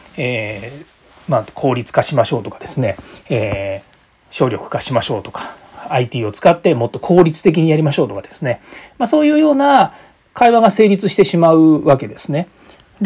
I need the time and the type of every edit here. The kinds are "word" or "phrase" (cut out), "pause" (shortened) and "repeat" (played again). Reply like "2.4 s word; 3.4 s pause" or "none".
none